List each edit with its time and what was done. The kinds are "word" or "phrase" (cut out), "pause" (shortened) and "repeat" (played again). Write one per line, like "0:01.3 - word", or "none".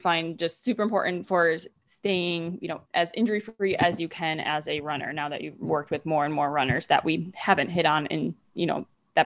0:02.9 - pause